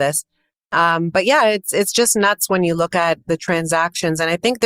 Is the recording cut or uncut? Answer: uncut